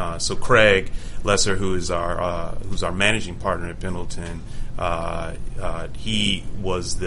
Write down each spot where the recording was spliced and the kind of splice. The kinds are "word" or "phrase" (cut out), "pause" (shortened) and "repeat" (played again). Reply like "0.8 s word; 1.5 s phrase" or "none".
none